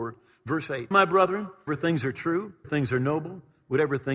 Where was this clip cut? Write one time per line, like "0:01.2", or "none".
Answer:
0:00.9
0:01.7
0:02.6